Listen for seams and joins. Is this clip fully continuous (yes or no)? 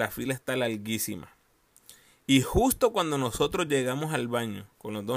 yes